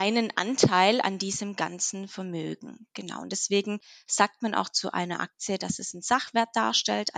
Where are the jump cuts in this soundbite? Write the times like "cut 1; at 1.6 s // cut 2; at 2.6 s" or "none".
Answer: none